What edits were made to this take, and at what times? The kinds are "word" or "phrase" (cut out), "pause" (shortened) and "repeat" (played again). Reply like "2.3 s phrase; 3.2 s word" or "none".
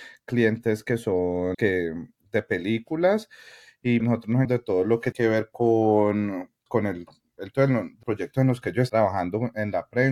1.5 s word; 4.0 s word; 4.4 s word; 5.1 s word; 6.7 s word; 7.5 s word; 8.0 s word; 8.9 s word